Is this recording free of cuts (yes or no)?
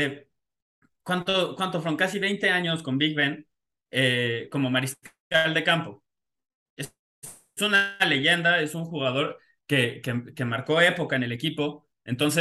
yes